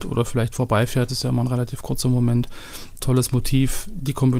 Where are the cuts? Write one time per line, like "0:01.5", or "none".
0:01.1
0:03.0